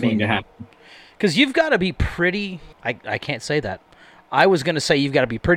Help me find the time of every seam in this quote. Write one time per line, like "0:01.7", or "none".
0:02.7

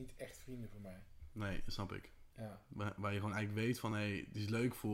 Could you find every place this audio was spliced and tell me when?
none

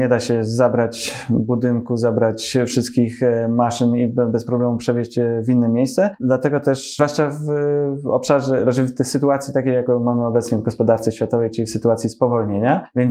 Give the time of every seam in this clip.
none

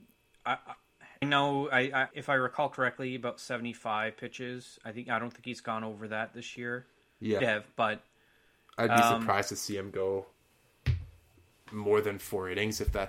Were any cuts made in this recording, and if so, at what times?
0:01.2
0:02.1
0:07.4

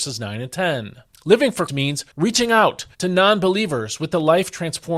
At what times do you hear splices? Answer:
0:01.1
0:01.7
0:02.1
0:02.9

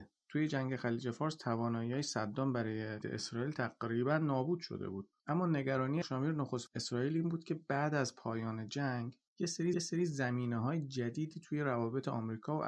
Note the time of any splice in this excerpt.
0:03.0
0:05.2
0:06.0
0:06.7
0:09.3
0:09.7

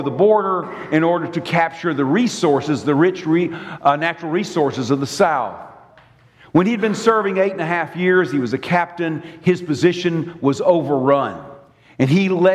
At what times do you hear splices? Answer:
none

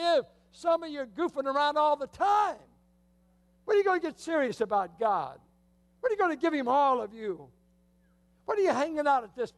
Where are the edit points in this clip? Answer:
none

